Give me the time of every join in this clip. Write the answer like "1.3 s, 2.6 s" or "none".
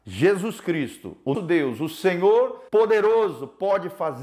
1.3 s, 2.7 s